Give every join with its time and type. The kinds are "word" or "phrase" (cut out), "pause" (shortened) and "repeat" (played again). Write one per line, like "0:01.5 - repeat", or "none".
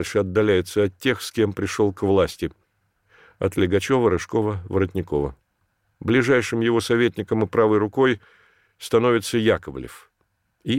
none